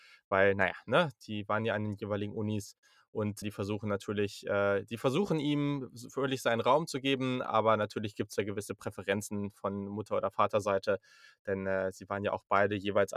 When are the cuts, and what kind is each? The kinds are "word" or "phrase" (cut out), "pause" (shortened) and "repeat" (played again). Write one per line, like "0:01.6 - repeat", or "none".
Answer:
0:03.4 - word